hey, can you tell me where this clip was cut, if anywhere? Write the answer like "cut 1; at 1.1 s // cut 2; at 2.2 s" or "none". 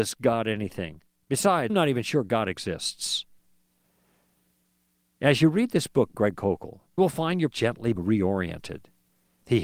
cut 1; at 1.7 s // cut 2; at 6.1 s // cut 3; at 7.0 s // cut 4; at 7.5 s // cut 5; at 7.9 s